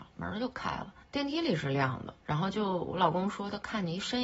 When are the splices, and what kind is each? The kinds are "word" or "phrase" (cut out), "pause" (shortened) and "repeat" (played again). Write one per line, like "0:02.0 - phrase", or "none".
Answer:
0:01.0 - pause
0:02.2 - pause

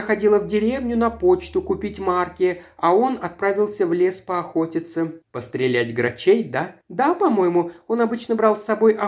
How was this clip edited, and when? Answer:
0:05.2 - pause
0:06.8 - pause

